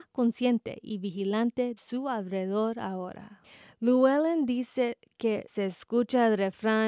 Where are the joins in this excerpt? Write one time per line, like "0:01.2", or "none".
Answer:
0:01.8
0:05.5